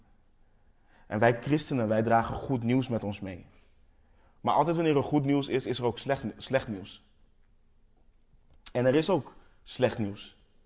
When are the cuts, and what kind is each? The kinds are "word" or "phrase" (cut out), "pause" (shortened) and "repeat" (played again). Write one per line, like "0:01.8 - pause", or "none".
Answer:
none